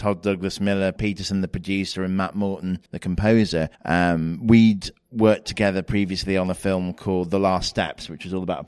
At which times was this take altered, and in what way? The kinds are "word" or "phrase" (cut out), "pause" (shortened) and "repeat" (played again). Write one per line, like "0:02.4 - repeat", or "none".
0:01.0 - word
0:02.9 - pause
0:03.7 - pause